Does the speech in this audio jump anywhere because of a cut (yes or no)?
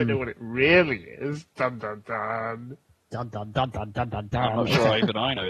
no